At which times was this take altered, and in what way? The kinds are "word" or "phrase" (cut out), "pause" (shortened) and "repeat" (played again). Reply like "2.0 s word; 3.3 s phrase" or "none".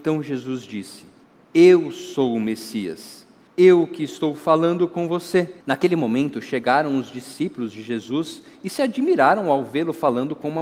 1.2 s pause; 3.5 s pause; 5.6 s pause